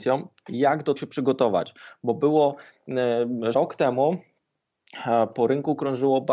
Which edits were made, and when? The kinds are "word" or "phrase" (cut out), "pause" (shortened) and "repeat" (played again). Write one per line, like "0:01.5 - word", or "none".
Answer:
0:01.0 - word
0:03.5 - word